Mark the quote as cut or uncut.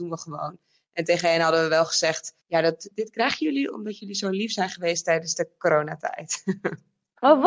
cut